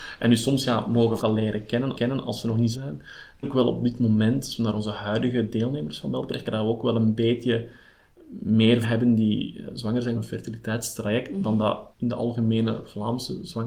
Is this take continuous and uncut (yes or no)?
no